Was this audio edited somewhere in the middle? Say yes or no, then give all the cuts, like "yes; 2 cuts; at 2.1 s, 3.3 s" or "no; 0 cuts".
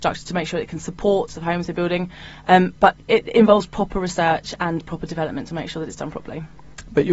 yes; 1 cut; at 1.3 s